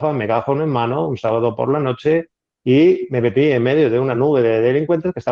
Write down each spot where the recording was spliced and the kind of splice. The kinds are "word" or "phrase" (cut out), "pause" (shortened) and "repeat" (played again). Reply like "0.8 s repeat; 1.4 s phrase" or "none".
none